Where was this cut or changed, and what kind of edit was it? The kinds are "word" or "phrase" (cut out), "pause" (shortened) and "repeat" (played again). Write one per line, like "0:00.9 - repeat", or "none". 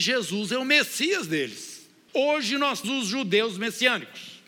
0:02.8 - word